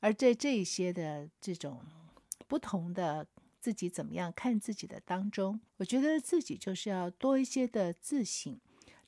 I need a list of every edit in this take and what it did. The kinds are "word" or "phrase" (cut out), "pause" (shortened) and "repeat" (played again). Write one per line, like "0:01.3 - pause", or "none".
0:05.7 - pause